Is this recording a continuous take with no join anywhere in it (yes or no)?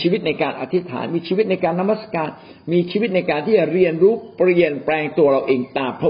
yes